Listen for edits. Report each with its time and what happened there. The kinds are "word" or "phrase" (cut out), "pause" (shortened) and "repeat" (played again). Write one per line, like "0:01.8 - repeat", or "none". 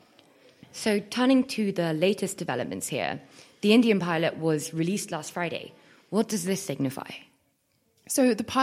none